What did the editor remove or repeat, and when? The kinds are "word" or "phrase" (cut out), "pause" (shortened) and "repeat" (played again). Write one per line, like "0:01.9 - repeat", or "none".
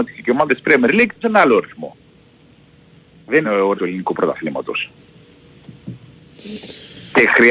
0:01.2 - word
0:03.4 - word
0:03.7 - word